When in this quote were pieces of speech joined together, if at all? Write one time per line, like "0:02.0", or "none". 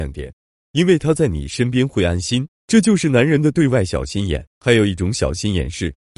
0:04.5